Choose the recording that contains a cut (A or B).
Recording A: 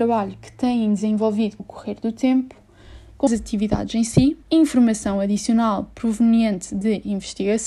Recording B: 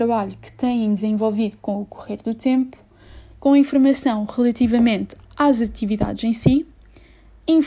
A